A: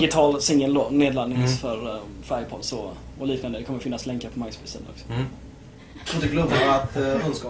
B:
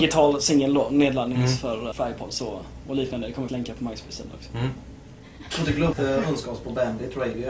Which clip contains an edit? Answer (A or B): B